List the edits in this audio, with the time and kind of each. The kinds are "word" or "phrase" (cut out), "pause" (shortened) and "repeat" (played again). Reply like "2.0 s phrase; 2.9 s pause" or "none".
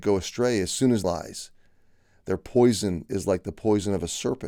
1.0 s phrase